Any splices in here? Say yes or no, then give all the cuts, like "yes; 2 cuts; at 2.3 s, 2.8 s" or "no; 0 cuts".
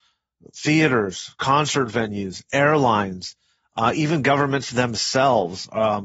no; 0 cuts